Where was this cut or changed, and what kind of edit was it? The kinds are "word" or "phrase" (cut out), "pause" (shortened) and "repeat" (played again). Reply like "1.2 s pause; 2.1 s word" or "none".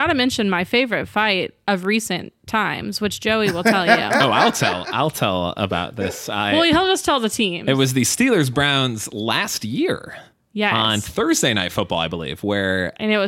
none